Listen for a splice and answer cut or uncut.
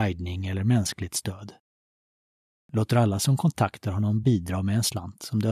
uncut